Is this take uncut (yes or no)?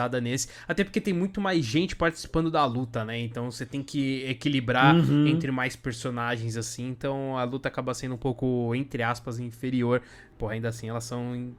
yes